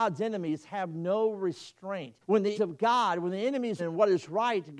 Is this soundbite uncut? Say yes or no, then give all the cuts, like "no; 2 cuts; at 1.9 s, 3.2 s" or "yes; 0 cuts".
no; 3 cuts; at 2.2 s, 2.5 s, 3.8 s